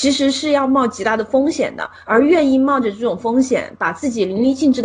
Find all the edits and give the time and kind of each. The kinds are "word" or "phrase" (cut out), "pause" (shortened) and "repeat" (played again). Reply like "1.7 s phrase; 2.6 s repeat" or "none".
none